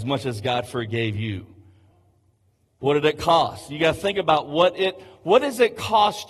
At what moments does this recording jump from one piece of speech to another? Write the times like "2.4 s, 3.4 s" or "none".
none